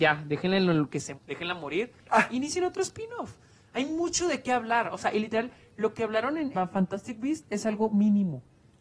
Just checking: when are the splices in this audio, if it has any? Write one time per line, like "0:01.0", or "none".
0:01.2
0:06.5